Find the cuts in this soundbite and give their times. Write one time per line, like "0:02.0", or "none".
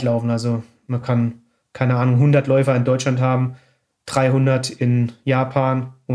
none